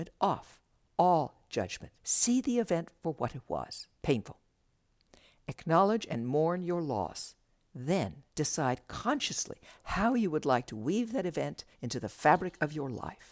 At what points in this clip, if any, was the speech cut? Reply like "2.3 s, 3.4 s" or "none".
2.0 s, 3.9 s, 8.3 s, 11.7 s